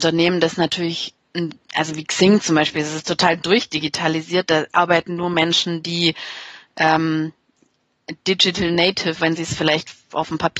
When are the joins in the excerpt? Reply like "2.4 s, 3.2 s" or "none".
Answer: 9.2 s